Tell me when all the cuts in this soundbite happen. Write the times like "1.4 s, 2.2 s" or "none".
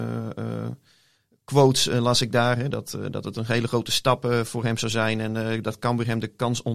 2.7 s